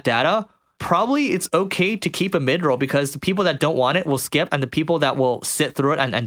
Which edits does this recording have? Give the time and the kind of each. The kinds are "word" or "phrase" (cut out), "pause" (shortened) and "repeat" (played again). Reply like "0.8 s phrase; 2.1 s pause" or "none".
none